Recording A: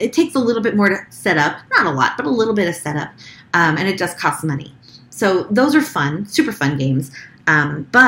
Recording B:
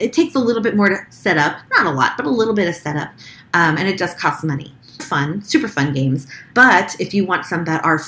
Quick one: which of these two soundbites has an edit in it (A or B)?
B